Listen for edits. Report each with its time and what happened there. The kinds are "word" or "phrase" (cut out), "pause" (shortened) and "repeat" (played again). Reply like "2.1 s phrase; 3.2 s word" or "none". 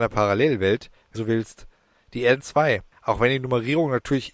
1.1 s word; 2.4 s word